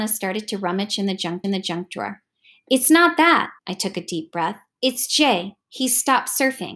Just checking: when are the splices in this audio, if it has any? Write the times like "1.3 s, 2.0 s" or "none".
1.4 s, 3.6 s, 5.6 s